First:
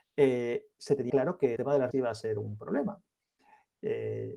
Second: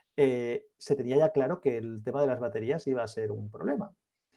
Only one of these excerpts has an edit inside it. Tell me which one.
first; 3 cuts; at 1.1 s, 1.6 s, 1.9 s

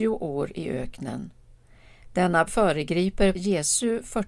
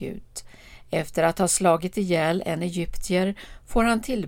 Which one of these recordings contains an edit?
first; 2 cuts; at 2.5 s, 3.3 s

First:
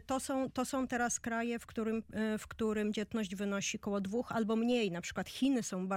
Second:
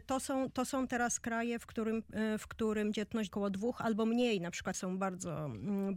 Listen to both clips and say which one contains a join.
second; 2 cuts; at 3.3 s, 4.7 s

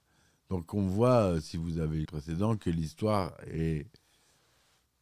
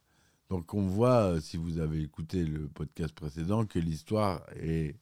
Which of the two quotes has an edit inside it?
first; 1 cut; at 2.1 s

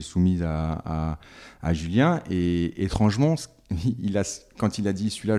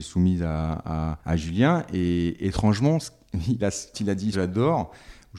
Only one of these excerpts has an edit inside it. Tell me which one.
second; 4 cuts; at 1.2 s, 3.6 s, 3.9 s, 4.3 s

